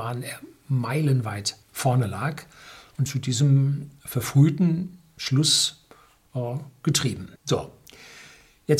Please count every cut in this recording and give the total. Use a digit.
3